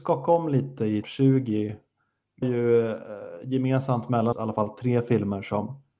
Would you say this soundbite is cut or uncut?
cut